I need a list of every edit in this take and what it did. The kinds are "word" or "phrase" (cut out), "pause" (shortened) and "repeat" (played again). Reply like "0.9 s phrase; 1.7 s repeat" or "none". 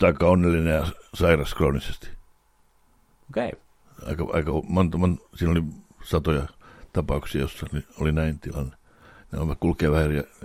none